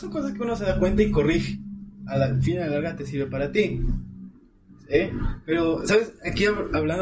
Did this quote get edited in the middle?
no; 0 cuts

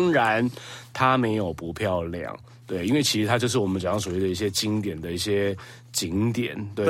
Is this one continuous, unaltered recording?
yes; 0 cuts

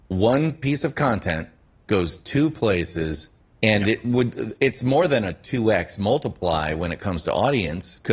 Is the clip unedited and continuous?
yes; 0 cuts

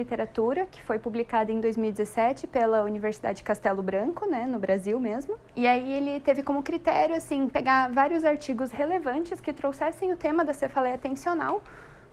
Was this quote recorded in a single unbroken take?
no; 1 cut; at 5.5 s

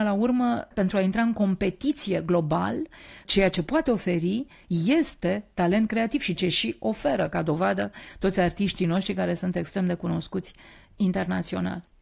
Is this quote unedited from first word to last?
no; 1 cut; at 6.4 s

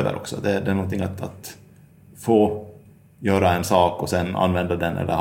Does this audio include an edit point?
no; 0 cuts

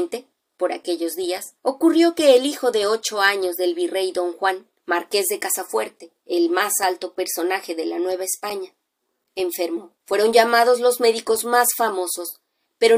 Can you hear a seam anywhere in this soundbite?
yes; 4 cuts; at 1.6 s, 4.8 s, 6.2 s, 10.0 s

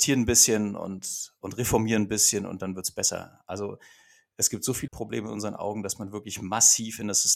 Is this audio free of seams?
no; 1 cut; at 4.9 s

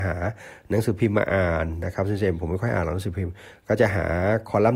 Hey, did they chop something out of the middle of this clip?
no; 0 cuts

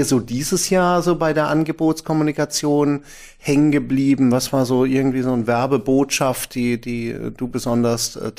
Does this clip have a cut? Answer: no; 0 cuts

